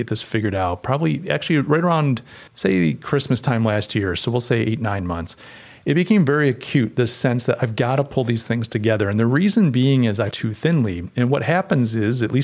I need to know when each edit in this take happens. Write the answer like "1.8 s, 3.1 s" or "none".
2.5 s, 10.3 s